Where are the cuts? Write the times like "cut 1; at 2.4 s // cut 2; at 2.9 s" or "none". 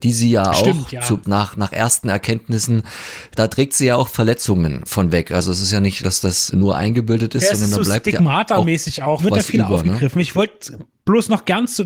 cut 1; at 1.2 s // cut 2; at 3.4 s // cut 3; at 4.9 s // cut 4; at 6.0 s // cut 5; at 6.5 s // cut 6; at 9.2 s

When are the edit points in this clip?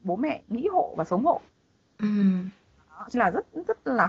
cut 1; at 3.1 s

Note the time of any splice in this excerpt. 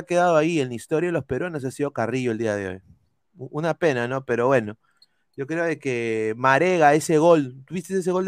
none

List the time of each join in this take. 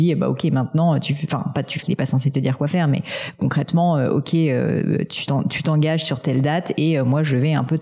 cut 1; at 1.8 s

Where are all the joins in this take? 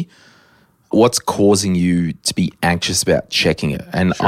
none

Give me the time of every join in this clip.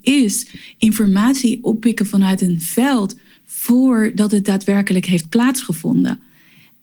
none

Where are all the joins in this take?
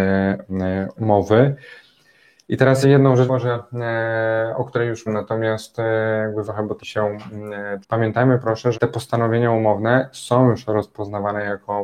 cut 1; at 1.0 s // cut 2; at 2.8 s // cut 3; at 3.3 s // cut 4; at 5.1 s // cut 5; at 6.4 s // cut 6; at 6.8 s // cut 7; at 7.8 s // cut 8; at 8.7 s

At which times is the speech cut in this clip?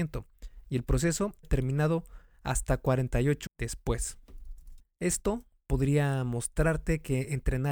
cut 1; at 1.4 s // cut 2; at 3.5 s

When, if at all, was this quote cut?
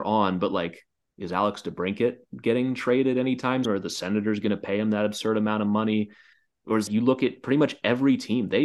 cut 1; at 3.6 s // cut 2; at 6.9 s

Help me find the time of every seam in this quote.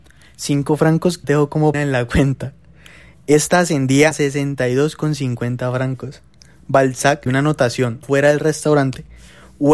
cut 1; at 1.2 s // cut 2; at 1.7 s // cut 3; at 4.1 s // cut 4; at 7.3 s // cut 5; at 8.0 s

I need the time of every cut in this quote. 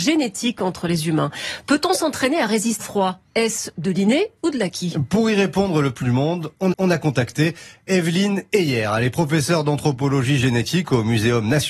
cut 1; at 2.8 s // cut 2; at 6.0 s // cut 3; at 6.7 s

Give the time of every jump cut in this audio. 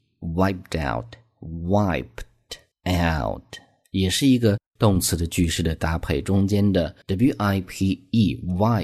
cut 1; at 2.7 s // cut 2; at 4.7 s // cut 3; at 7.0 s

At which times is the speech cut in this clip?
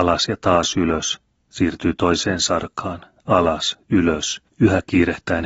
none

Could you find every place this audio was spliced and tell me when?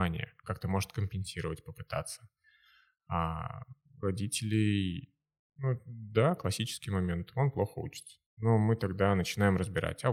cut 1; at 3.8 s // cut 2; at 8.3 s

